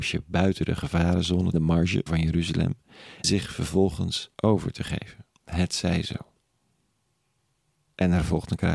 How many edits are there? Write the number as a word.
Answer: five